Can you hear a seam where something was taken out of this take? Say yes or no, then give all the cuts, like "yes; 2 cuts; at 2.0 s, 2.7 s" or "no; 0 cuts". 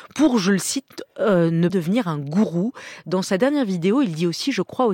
yes; 1 cut; at 1.7 s